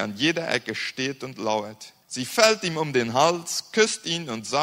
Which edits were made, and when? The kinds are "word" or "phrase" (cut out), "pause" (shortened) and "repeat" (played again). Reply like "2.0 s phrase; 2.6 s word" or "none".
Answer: 2.0 s pause